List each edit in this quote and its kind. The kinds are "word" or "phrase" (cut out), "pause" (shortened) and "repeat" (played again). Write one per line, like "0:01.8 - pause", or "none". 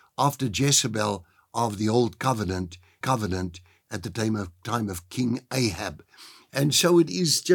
0:03.0 - repeat